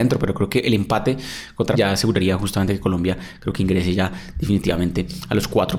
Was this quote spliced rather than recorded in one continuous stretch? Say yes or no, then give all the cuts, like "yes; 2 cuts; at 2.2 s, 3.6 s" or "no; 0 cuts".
yes; 1 cut; at 1.7 s